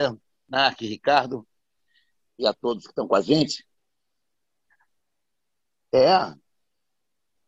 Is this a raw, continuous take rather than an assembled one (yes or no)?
yes